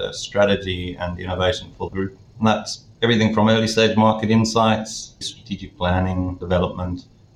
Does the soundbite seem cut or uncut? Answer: cut